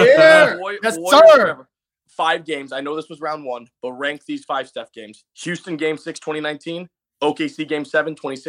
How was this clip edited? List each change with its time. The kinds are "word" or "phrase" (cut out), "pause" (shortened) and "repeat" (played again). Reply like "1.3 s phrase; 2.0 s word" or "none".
2.0 s phrase